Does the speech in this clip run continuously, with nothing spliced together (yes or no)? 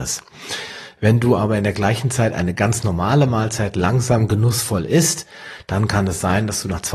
yes